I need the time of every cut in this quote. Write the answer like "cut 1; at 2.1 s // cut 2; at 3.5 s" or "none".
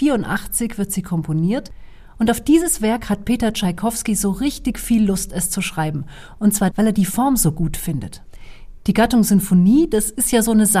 cut 1; at 6.7 s